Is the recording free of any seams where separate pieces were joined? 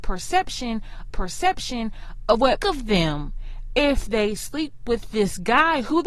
no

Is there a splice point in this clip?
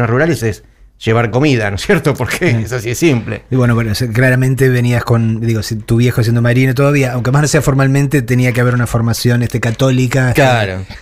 no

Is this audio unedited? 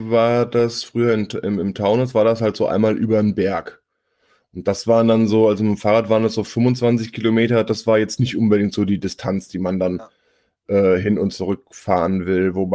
yes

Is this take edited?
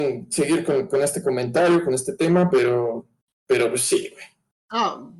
no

